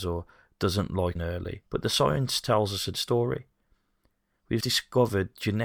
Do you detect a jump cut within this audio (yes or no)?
yes